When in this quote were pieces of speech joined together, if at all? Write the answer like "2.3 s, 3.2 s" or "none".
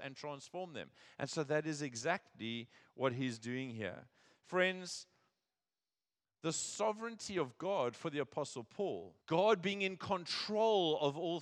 9.2 s